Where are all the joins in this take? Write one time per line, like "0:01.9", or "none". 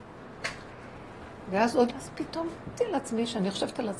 0:01.9
0:02.8